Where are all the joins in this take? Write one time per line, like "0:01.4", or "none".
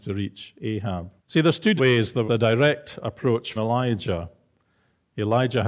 0:01.2
0:01.8
0:02.3
0:03.6